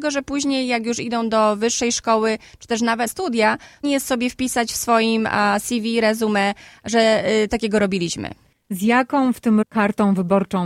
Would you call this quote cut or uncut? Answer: cut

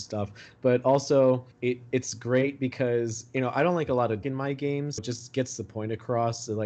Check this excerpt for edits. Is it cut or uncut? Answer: cut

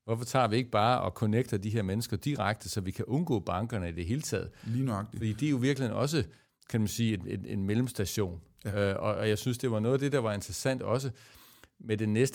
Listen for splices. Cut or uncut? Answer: uncut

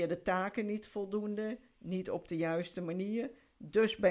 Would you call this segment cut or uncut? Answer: uncut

